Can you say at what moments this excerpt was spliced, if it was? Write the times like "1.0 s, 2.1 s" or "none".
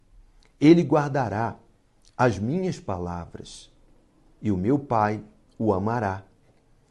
none